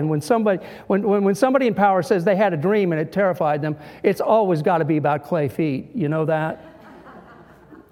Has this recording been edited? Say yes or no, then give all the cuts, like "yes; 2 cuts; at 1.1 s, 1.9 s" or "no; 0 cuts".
no; 0 cuts